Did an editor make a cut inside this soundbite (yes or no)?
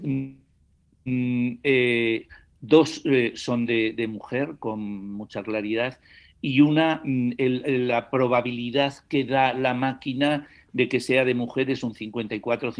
no